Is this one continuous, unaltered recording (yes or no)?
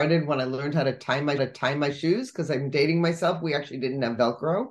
no